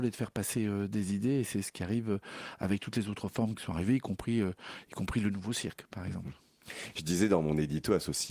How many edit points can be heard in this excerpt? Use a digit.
0